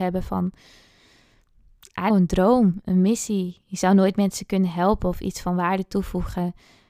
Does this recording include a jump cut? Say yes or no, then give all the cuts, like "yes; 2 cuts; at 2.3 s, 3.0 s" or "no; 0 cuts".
yes; 1 cut; at 2.1 s